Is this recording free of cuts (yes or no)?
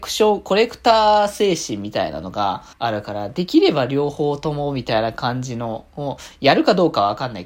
no